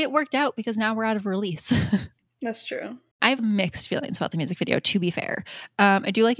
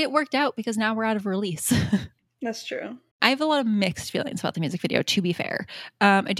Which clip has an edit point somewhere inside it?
first; 1 cut; at 3.4 s

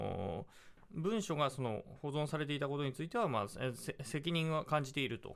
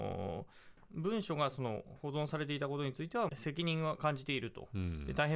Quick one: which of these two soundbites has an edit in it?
second; 1 cut; at 3.3 s

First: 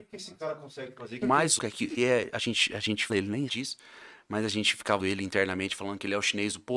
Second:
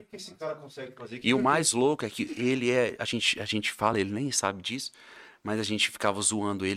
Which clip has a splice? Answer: first; 6 cuts; at 1.2 s, 1.6 s, 2.0 s, 3.1 s, 3.5 s, 5.0 s

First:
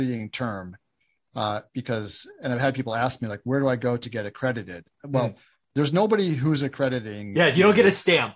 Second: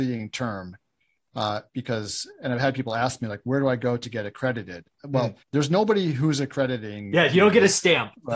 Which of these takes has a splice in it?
second; 1 cut; at 5.4 s

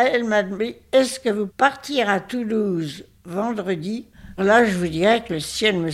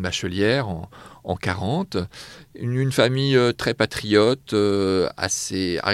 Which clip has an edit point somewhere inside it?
first; 2 cuts; at 1.5 s, 4.4 s

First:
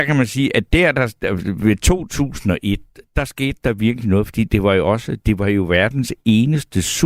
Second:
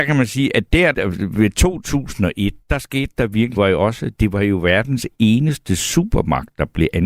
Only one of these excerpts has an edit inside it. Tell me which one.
second; 3 cuts; at 0.9 s, 2.6 s, 3.6 s

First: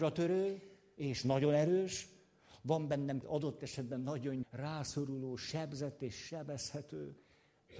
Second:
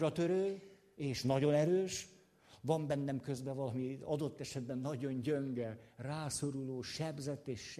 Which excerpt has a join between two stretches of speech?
first; 2 cuts; at 3.2 s, 4.4 s

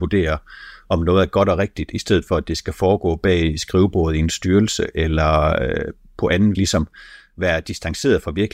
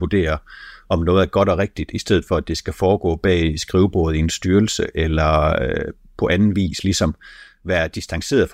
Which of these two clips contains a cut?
first; 1 cut; at 6.5 s

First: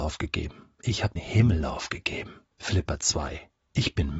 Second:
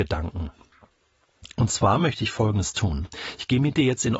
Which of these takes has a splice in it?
first; 2 cuts; at 1.2 s, 2.5 s

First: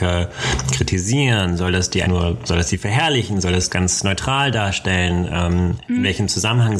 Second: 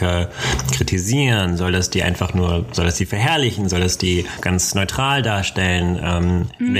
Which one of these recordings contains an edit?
first; 2 cuts; at 2.0 s, 3.7 s

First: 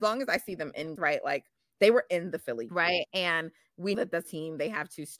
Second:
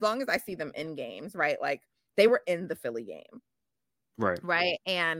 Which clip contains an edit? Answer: first; 4 cuts; at 1.0 s, 2.7 s, 3.9 s, 4.2 s

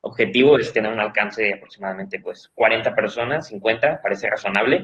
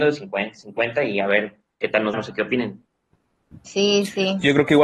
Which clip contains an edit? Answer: second; 1 cut; at 2.1 s

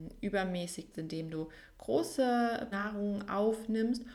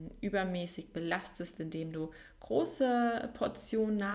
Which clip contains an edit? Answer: first; 2 cuts; at 0.9 s, 2.7 s

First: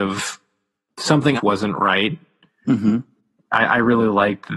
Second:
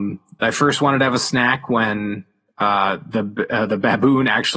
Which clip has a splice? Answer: first; 1 cut; at 1.4 s

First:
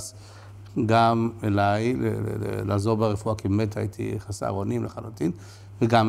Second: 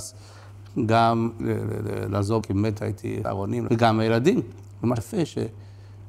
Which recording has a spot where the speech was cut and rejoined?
second; 5 cuts; at 1.4 s, 2.4 s, 3.2 s, 3.7 s, 5.0 s

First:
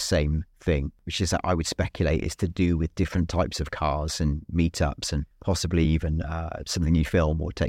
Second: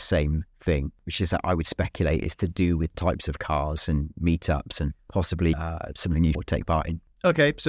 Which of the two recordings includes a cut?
second; 3 cuts; at 2.9 s, 5.5 s, 6.3 s

